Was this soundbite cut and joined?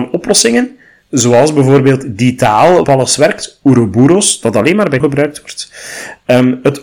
yes; 2 cuts; at 2.8 s, 5.0 s

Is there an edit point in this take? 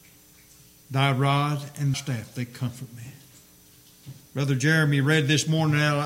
yes; 2 cuts; at 1.9 s, 4.2 s

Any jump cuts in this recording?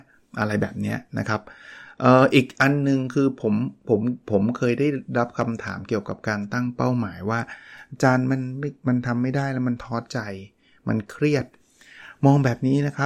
no; 0 cuts

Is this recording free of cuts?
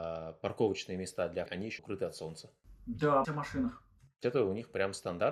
no; 4 cuts; at 1.5 s, 1.8 s, 3.2 s, 4.2 s

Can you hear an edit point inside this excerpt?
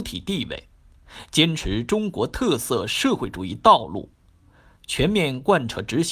no; 0 cuts

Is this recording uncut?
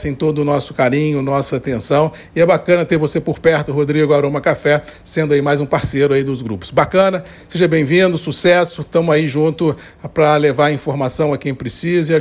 yes; 0 cuts

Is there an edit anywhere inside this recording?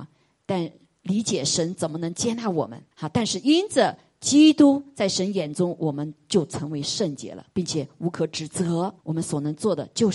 yes; 3 cuts; at 2.9 s, 7.5 s, 9.0 s

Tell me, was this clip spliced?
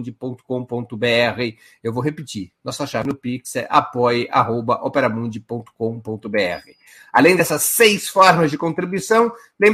no; 0 cuts

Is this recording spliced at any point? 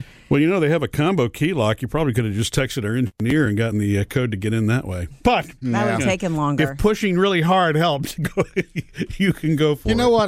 yes; 2 cuts; at 5.2 s, 5.6 s

